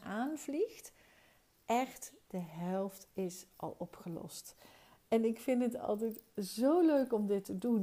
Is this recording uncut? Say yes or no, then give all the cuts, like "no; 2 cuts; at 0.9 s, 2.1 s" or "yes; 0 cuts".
yes; 0 cuts